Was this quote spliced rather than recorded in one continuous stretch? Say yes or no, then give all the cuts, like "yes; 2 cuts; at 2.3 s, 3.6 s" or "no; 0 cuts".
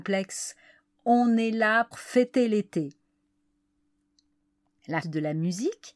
yes; 2 cuts; at 1.9 s, 5.0 s